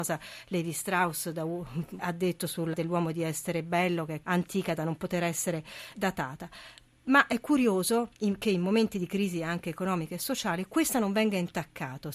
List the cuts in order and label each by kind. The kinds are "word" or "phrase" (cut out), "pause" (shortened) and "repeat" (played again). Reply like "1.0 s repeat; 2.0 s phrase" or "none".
2.0 s phrase; 2.7 s word; 4.2 s word; 5.9 s word; 8.1 s pause

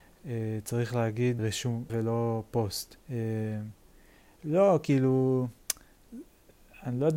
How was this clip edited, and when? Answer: 1.4 s word; 1.9 s word; 3.0 s pause

